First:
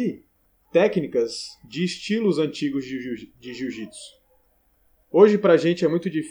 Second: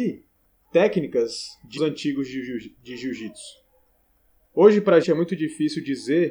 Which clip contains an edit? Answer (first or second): second